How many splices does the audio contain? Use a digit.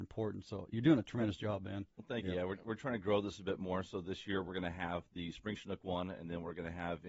0